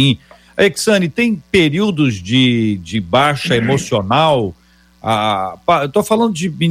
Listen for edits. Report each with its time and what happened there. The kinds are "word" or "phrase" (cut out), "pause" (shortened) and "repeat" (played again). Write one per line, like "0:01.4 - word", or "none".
none